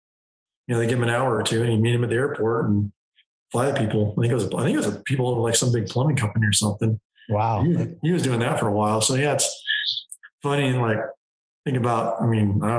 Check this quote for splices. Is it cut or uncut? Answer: uncut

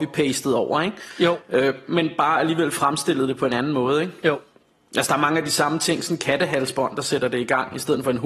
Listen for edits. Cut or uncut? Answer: uncut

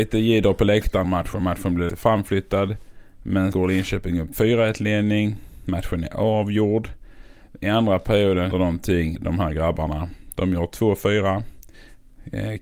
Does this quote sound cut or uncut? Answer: cut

